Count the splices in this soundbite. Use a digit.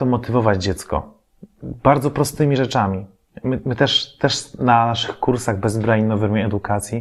0